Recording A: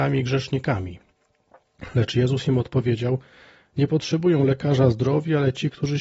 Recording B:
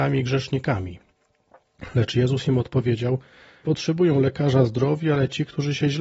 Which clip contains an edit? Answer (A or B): B